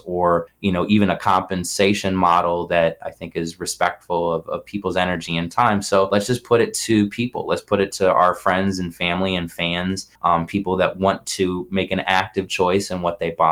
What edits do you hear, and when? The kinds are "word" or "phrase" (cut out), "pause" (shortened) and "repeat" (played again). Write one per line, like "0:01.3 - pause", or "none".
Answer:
0:10.2 - pause